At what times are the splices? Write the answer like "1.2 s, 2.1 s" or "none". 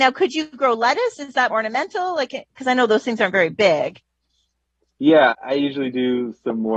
1.5 s, 5.3 s